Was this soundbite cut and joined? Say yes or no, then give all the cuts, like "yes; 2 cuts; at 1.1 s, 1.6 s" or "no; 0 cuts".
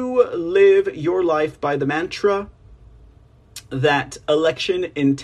no; 0 cuts